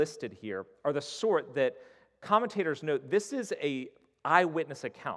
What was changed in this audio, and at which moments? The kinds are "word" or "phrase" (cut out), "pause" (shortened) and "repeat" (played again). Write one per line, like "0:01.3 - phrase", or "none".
none

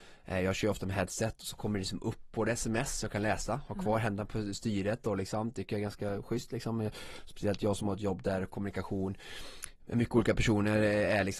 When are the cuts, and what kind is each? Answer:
none

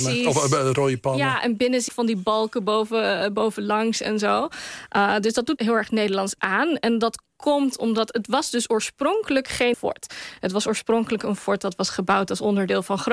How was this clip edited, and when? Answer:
0:01.9 - phrase
0:05.6 - word
0:09.7 - word

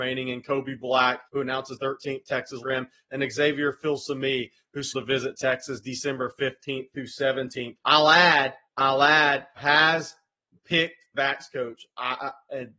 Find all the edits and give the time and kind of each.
0:01.2 - pause
0:01.8 - word
0:02.6 - word
0:04.9 - word
0:07.8 - pause
0:08.7 - pause
0:09.6 - word
0:11.1 - phrase

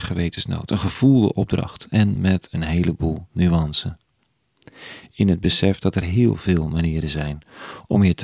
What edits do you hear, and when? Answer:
none

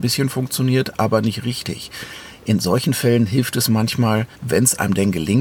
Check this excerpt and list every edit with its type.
0:04.3 - pause

